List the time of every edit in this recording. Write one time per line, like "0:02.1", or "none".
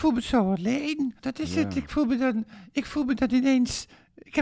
0:01.2